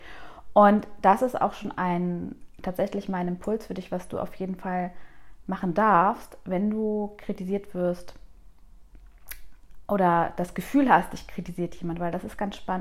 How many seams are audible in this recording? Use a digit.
0